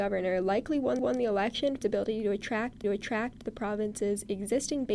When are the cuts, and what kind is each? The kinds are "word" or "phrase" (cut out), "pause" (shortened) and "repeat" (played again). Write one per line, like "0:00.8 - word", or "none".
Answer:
0:01.0 - repeat
0:01.8 - word
0:02.8 - repeat